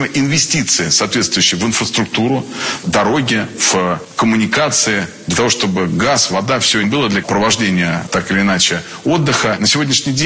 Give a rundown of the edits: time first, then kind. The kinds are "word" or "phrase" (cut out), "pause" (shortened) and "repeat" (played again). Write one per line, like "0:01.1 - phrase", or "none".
0:02.8 - word
0:06.8 - word
0:07.2 - word